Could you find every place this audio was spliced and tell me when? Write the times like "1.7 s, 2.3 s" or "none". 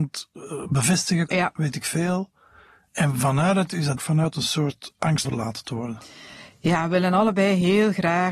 1.3 s, 4.0 s, 5.2 s